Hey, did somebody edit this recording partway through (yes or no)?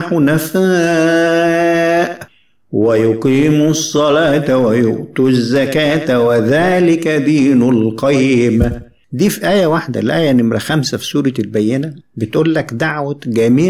no